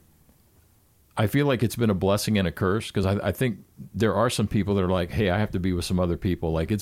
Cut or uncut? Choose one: uncut